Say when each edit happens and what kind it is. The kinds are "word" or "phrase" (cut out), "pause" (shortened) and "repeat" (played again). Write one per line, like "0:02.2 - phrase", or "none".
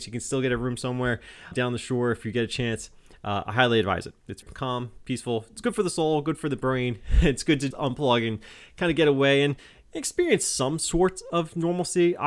0:01.5 - word
0:04.4 - word
0:07.7 - word